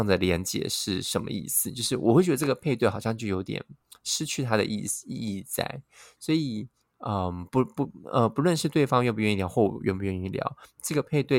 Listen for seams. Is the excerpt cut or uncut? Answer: uncut